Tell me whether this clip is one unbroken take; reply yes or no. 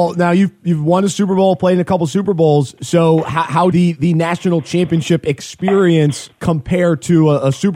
no